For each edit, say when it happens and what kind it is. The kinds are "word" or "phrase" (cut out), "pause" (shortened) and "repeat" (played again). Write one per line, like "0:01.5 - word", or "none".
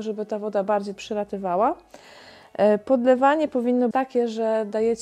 0:01.0 - word
0:03.9 - word